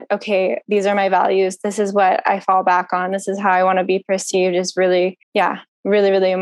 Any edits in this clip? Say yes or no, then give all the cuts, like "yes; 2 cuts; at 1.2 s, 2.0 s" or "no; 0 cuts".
yes; 1 cut; at 5.2 s